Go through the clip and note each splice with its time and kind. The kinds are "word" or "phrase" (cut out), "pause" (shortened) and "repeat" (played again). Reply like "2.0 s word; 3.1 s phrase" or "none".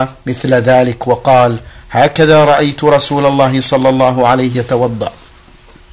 4.5 s word